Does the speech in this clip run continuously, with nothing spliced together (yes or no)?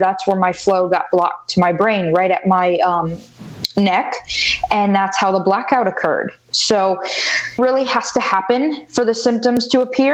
no